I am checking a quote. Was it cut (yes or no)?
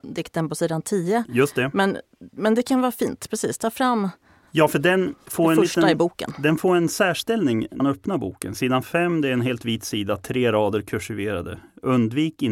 yes